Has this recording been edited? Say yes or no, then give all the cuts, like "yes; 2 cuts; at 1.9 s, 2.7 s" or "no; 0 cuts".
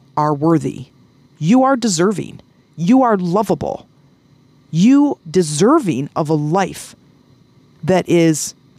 yes; 1 cut; at 5.2 s